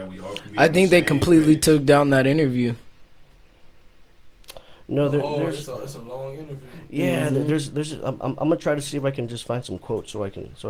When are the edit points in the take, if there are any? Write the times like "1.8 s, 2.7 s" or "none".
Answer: none